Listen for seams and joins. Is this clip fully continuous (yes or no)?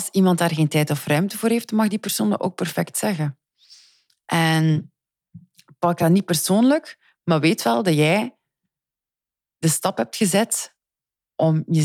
yes